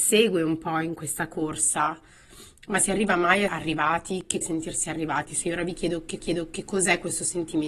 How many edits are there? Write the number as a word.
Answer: three